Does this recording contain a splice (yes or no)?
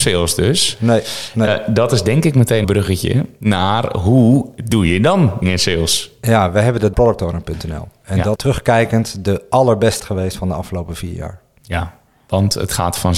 yes